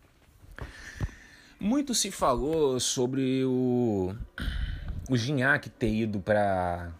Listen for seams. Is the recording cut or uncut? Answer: uncut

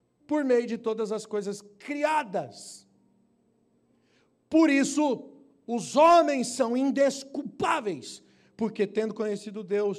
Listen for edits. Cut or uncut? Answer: uncut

